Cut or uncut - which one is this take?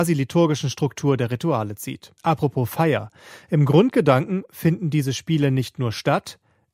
cut